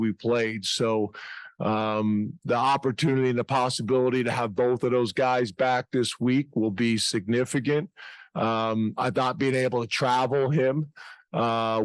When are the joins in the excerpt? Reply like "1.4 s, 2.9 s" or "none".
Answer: none